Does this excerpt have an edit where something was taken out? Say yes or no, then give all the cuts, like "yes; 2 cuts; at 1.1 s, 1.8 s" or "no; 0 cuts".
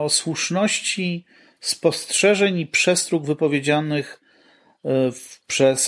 no; 0 cuts